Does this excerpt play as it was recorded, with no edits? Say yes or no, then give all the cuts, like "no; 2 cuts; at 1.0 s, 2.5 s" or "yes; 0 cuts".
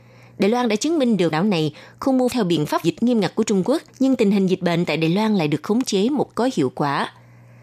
no; 5 cuts; at 1.3 s, 2.3 s, 2.8 s, 3.9 s, 6.3 s